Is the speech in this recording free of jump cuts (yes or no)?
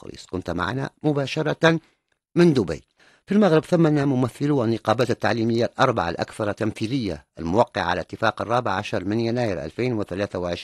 yes